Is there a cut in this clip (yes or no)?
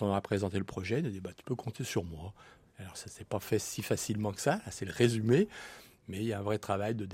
no